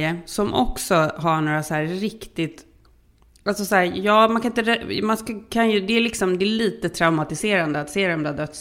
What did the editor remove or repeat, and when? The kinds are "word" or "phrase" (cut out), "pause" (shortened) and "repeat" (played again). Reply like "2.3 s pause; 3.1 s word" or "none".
none